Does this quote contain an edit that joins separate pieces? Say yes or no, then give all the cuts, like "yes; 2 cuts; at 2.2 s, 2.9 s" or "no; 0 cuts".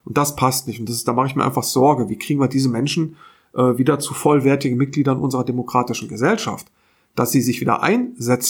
no; 0 cuts